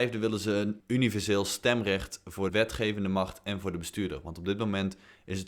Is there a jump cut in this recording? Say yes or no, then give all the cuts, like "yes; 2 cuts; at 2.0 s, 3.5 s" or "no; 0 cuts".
yes; 1 cut; at 2.5 s